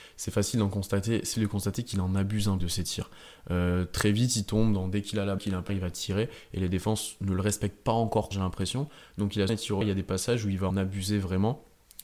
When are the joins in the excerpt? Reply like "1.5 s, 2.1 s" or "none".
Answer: 1.3 s, 2.6 s, 5.4 s, 5.7 s, 8.3 s, 9.5 s, 9.8 s, 10.7 s